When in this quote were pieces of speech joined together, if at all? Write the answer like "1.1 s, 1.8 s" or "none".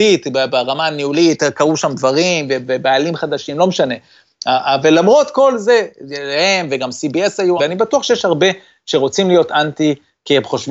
7.6 s